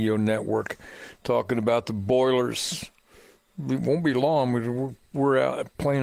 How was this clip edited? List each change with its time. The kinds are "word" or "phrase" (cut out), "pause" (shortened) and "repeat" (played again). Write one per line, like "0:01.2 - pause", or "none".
none